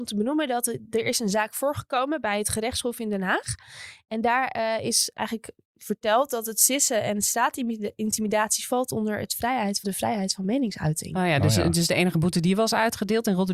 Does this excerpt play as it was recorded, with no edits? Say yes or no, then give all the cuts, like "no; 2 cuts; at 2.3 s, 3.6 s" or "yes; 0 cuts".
no; 2 cuts; at 5.1 s, 9.8 s